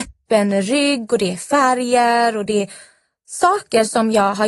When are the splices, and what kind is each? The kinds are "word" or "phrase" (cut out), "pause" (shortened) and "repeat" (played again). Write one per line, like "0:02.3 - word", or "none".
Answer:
none